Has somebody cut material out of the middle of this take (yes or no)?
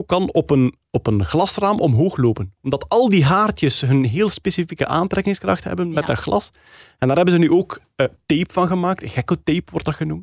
no